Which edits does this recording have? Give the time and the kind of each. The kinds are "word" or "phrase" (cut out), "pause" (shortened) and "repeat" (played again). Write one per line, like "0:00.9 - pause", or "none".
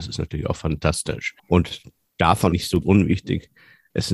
0:01.4 - pause
0:02.5 - word
0:02.8 - word